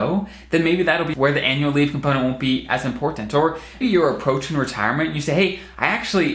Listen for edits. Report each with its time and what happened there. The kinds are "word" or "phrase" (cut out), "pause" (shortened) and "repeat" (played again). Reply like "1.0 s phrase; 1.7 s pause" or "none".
1.1 s word; 3.8 s word